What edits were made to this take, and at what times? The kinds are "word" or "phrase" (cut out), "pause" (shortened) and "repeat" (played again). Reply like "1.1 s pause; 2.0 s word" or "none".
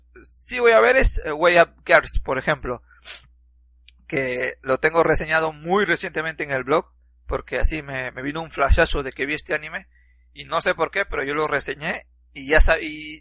none